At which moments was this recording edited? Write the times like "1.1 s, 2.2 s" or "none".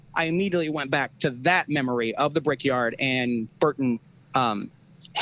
none